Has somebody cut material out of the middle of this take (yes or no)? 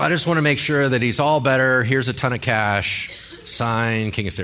no